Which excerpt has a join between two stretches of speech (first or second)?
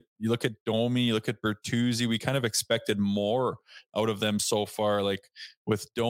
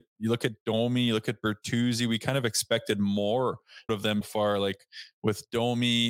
second